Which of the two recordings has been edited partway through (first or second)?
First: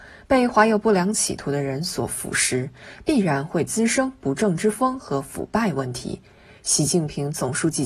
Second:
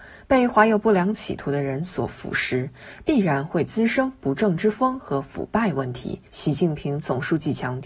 second